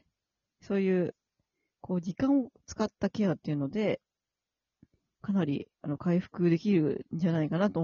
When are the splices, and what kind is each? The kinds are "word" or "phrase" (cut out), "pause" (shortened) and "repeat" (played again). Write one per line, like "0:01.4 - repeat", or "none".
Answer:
0:05.7 - pause